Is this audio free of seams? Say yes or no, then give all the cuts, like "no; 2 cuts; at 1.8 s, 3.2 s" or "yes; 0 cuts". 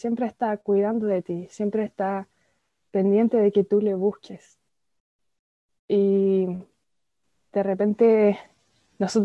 yes; 0 cuts